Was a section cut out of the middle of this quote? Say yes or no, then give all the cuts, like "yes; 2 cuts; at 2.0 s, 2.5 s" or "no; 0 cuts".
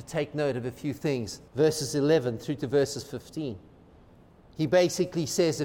yes; 1 cut; at 1.5 s